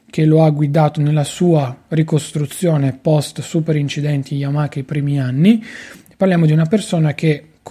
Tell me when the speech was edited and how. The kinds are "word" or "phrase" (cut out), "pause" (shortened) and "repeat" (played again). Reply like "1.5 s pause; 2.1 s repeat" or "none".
none